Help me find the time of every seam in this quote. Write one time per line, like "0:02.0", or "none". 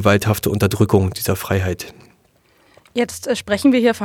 none